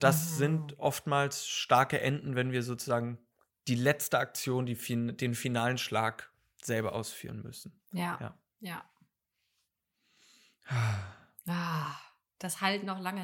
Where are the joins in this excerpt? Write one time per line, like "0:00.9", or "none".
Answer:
none